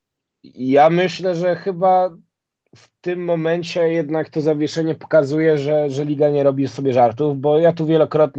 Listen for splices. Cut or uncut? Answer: uncut